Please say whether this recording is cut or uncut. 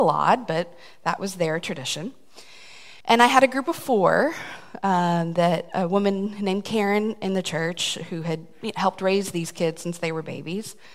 cut